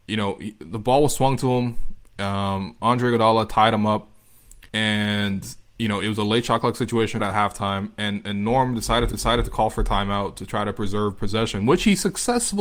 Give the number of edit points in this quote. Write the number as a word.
three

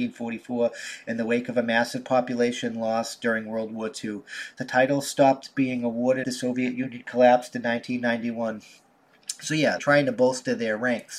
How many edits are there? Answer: two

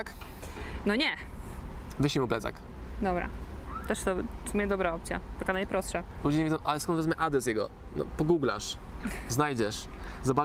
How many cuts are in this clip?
zero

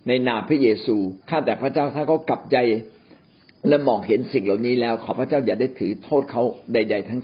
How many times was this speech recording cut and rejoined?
two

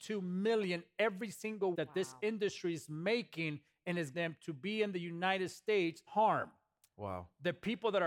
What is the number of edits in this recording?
three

